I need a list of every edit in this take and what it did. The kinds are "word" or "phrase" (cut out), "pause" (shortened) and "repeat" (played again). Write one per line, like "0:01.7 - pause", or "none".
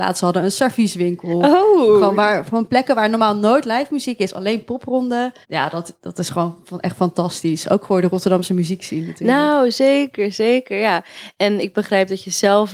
0:05.4 - pause